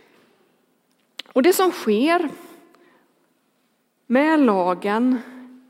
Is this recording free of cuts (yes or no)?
yes